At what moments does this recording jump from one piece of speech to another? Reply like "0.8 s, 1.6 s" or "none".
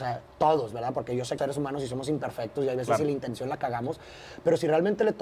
1.4 s